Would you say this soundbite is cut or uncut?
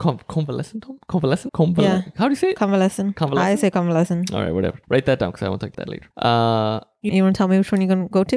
cut